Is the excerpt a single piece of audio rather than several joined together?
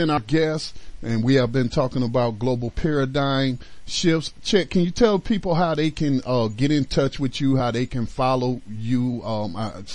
yes; 0 cuts

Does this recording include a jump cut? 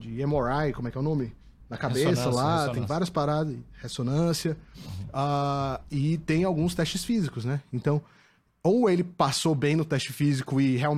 no; 0 cuts

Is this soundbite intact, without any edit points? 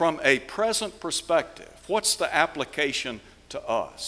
yes; 0 cuts

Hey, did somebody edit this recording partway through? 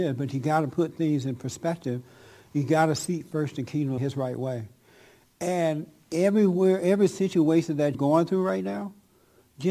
yes; 2 cuts; at 4.0 s, 7.9 s

